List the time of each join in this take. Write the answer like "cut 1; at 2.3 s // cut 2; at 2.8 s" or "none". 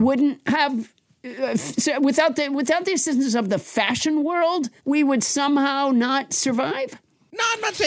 cut 1; at 4.8 s